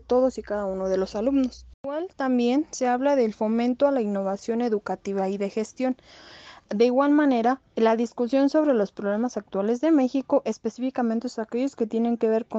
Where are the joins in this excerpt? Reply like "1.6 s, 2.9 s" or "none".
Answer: 1.7 s